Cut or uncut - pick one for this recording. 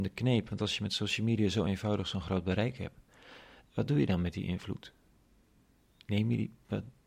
uncut